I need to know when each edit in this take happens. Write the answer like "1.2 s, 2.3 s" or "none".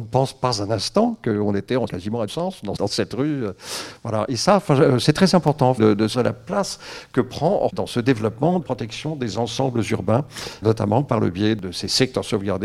1.9 s, 2.3 s, 2.8 s, 5.8 s, 6.1 s, 7.7 s, 8.6 s, 10.6 s